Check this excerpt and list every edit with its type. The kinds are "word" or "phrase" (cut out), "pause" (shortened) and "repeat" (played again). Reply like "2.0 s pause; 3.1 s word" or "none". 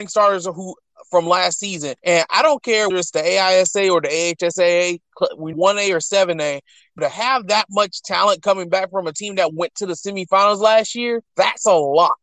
2.0 s pause; 2.9 s word; 5.5 s word; 7.0 s word; 11.3 s pause